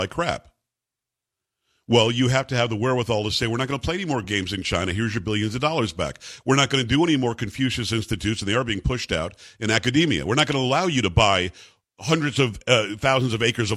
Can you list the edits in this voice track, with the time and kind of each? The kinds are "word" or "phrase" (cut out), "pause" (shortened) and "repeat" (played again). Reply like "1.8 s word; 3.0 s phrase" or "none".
none